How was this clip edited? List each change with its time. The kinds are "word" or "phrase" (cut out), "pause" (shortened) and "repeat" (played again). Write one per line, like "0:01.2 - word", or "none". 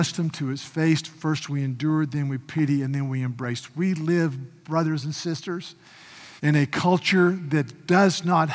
0:06.4 - pause